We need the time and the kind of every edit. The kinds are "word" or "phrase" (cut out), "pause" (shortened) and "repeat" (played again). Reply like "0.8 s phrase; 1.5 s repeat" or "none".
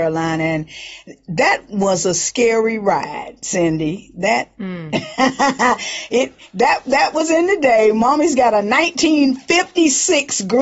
none